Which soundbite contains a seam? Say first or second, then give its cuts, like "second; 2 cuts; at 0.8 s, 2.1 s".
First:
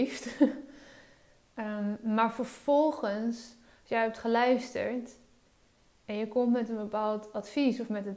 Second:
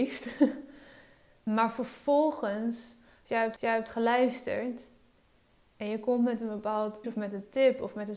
second; 3 cuts; at 1.5 s, 3.6 s, 7.0 s